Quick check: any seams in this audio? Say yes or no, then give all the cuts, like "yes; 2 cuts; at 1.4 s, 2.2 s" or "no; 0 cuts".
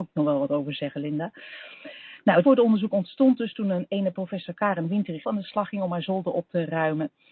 yes; 2 cuts; at 2.4 s, 5.2 s